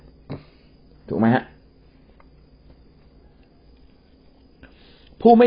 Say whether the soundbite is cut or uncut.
uncut